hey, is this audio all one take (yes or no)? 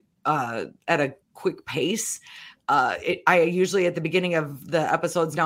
no